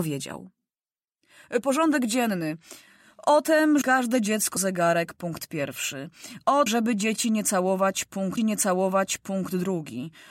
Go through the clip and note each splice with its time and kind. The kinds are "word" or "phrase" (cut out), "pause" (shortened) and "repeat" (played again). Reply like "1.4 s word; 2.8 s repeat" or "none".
1.6 s phrase; 3.8 s word; 4.6 s word; 6.7 s word; 8.4 s repeat